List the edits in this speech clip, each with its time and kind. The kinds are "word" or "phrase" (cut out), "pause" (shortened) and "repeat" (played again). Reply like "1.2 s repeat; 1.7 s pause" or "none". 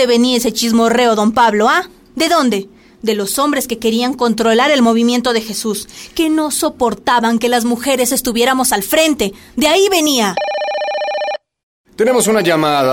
none

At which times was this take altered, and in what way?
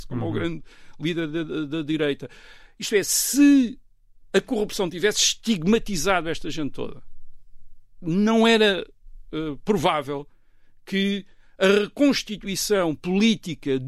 none

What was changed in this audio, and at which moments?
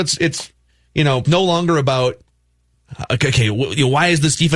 1.3 s word

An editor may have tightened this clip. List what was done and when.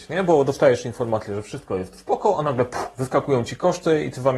none

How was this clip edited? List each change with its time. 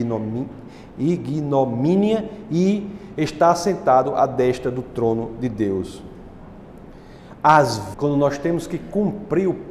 7.9 s word

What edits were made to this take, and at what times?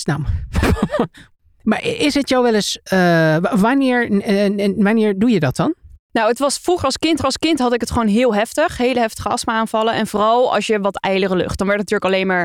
7.2 s repeat

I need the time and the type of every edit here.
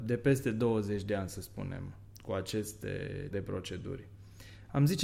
3.3 s word

